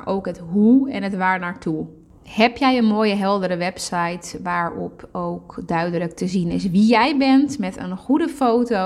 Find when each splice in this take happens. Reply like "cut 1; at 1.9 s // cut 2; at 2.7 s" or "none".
none